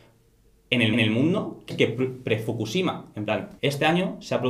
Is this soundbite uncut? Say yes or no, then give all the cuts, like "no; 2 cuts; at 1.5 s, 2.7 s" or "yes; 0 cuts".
no; 3 cuts; at 0.9 s, 1.7 s, 3.6 s